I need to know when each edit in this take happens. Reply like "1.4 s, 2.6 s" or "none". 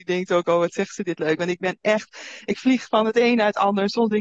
none